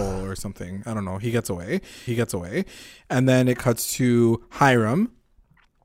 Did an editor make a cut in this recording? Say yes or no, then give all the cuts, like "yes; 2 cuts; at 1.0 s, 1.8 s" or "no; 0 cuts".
yes; 1 cut; at 2.1 s